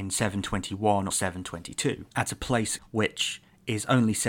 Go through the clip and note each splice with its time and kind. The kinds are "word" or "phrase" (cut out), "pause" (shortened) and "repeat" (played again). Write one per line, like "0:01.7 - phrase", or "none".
0:01.1 - word
0:02.1 - pause
0:02.8 - phrase